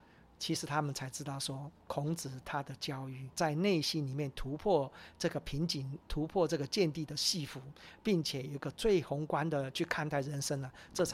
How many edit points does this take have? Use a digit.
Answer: 3